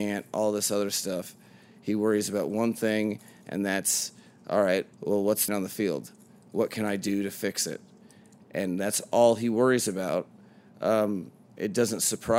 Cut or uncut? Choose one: cut